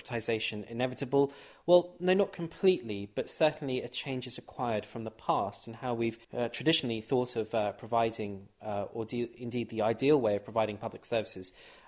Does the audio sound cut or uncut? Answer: cut